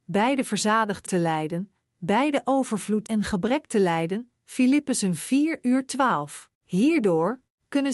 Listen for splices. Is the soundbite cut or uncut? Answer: cut